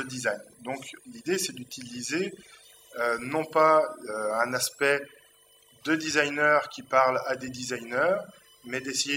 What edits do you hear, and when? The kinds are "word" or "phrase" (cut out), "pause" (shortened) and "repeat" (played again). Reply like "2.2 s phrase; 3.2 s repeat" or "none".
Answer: none